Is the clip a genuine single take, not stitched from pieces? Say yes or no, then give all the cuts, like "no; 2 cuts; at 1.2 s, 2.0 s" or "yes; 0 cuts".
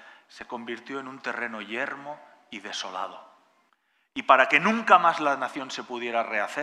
no; 1 cut; at 3.7 s